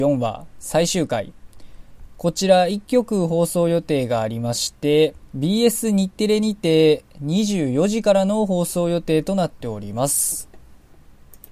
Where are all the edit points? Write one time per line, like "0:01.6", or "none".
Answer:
0:05.3